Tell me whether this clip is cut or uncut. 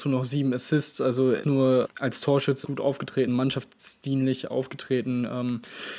cut